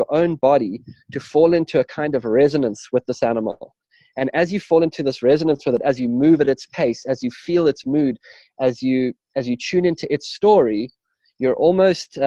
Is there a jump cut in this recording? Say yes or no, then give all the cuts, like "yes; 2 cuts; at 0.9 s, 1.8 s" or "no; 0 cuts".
no; 0 cuts